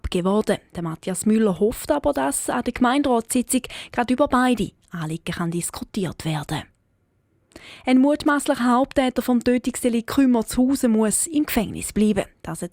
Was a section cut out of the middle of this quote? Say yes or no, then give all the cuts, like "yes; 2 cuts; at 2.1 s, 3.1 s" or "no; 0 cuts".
no; 0 cuts